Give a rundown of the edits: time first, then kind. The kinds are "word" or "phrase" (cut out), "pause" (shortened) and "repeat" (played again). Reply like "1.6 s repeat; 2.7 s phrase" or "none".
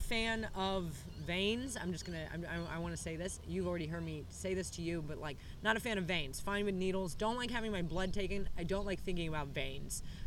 none

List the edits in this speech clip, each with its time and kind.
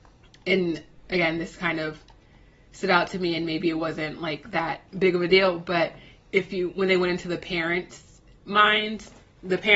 4.9 s pause

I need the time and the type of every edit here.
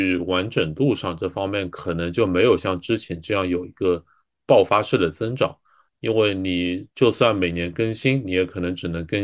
none

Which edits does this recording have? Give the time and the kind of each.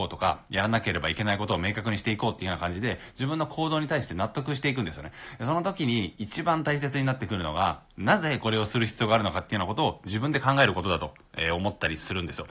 none

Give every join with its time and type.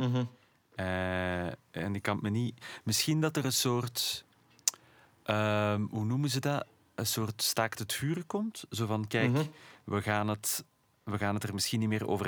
none

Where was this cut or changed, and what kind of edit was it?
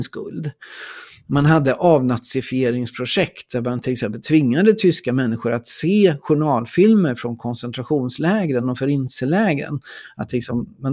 none

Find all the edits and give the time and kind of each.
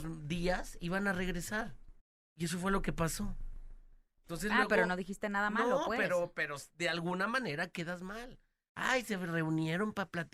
2.0 s pause

